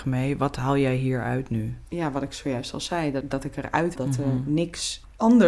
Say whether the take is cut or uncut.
cut